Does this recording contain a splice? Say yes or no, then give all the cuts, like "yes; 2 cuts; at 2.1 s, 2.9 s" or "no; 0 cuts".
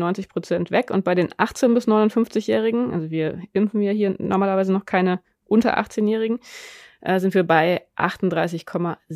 no; 0 cuts